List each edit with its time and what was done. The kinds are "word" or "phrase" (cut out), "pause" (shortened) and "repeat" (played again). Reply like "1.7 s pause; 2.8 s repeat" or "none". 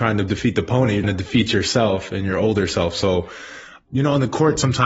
1.0 s word